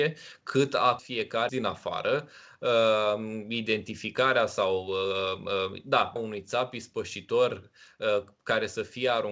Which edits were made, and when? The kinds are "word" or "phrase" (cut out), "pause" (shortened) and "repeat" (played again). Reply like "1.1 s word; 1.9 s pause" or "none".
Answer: 1.0 s word; 1.5 s phrase; 6.2 s word